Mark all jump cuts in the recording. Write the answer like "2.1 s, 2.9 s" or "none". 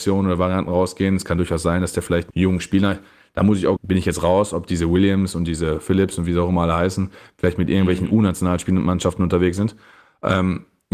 2.3 s, 3.8 s